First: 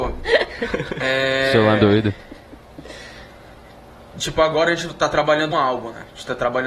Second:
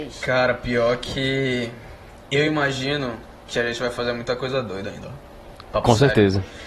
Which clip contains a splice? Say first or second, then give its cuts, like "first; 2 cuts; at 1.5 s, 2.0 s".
first; 2 cuts; at 1.8 s, 5.5 s